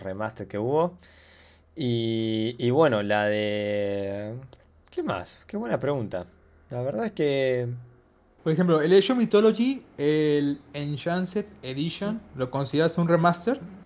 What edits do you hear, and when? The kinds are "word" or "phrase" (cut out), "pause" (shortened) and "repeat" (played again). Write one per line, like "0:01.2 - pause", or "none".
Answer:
none